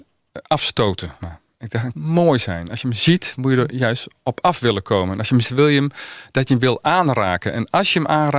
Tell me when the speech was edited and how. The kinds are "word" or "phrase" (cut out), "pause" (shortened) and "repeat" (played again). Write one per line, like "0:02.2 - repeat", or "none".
0:01.2 - word
0:01.9 - phrase
0:05.4 - word